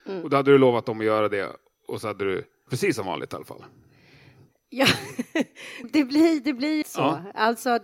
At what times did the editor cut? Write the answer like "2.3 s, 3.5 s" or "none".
2.7 s, 5.8 s, 6.8 s

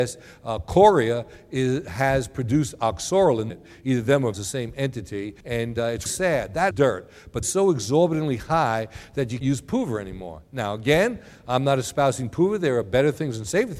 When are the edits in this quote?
3.5 s, 4.3 s, 5.4 s, 6.1 s, 6.7 s, 7.4 s, 9.4 s

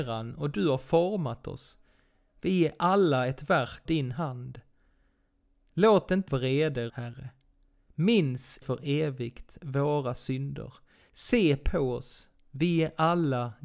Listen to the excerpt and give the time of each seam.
3.9 s, 6.3 s, 6.9 s, 8.6 s

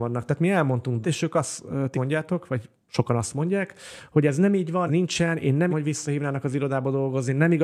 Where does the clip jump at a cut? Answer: 1.0 s, 1.9 s, 4.9 s, 5.7 s

